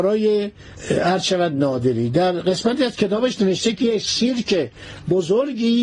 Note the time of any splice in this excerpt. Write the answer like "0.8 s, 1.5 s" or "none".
none